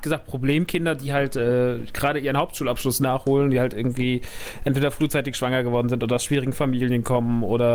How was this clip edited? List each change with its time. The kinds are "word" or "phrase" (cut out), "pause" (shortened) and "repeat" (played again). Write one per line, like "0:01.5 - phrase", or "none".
none